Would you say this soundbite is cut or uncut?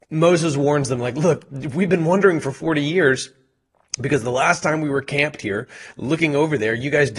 uncut